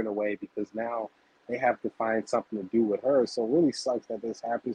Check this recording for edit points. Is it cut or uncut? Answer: uncut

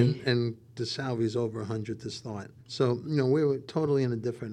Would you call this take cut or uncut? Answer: cut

